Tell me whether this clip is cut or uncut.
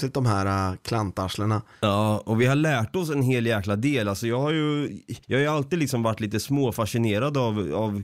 cut